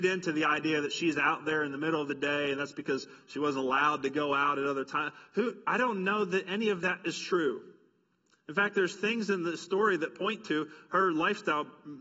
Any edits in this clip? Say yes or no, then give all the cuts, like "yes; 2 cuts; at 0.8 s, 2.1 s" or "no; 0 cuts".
no; 0 cuts